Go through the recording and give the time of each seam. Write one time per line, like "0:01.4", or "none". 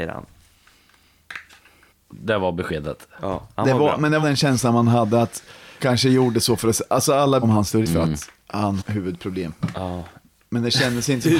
0:01.9
0:04.2
0:05.8
0:07.4
0:07.8
0:08.8